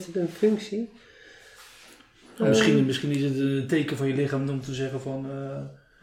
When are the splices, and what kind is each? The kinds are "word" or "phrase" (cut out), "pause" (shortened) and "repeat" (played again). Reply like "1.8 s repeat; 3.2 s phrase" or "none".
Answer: none